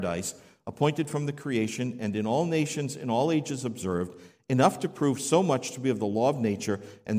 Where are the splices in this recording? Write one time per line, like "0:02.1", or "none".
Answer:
none